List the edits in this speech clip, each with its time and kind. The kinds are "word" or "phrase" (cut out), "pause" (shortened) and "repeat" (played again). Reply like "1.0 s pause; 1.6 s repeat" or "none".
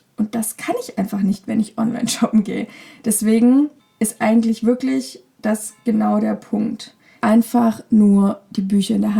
3.8 s pause; 7.2 s phrase